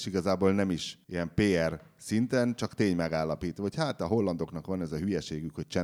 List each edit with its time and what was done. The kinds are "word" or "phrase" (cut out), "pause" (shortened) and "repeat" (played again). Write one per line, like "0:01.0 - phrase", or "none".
0:01.0 - pause